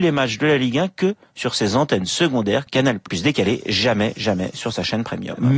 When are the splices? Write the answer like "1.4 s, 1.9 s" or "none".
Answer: 2.7 s, 3.1 s